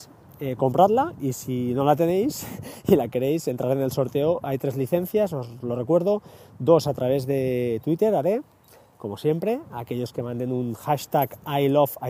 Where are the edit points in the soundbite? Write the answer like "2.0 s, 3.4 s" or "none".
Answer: none

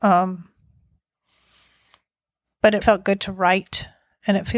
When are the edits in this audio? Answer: 2.8 s

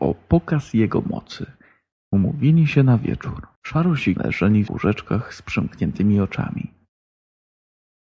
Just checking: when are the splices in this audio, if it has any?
1.9 s, 3.6 s, 4.2 s, 4.7 s

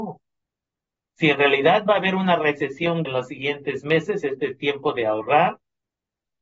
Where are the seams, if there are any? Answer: 3.1 s

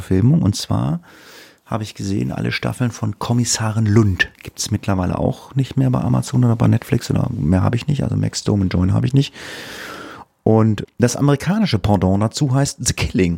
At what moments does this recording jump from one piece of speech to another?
4.3 s, 7.3 s, 10.8 s

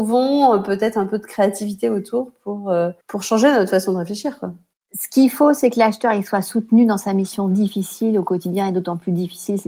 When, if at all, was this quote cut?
3.0 s, 4.7 s

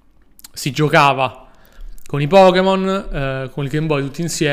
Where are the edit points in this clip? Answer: none

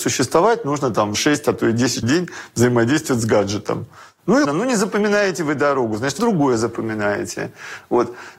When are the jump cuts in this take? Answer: 1.1 s, 2.0 s, 4.4 s, 6.2 s

